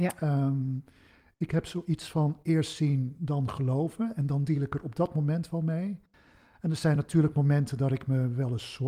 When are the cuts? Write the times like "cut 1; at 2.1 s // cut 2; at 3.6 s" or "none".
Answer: none